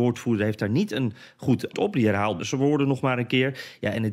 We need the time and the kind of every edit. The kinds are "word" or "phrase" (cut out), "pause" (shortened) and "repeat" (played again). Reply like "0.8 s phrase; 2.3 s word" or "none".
1.7 s word; 2.4 s word